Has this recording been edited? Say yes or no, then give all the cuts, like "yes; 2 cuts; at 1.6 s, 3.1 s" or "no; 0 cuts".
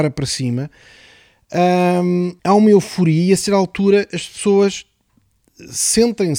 yes; 1 cut; at 2.4 s